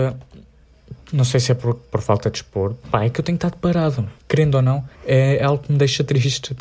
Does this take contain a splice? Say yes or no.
yes